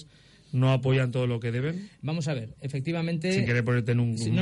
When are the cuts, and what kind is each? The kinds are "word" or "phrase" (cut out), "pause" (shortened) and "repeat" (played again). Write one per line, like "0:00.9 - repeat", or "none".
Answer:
none